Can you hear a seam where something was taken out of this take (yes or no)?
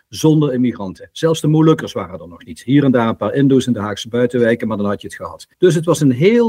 yes